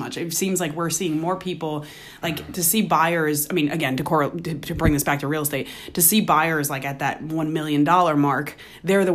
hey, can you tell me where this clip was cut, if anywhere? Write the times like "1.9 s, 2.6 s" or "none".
none